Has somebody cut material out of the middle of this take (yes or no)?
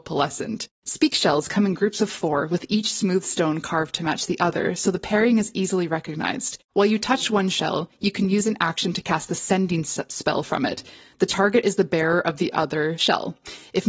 no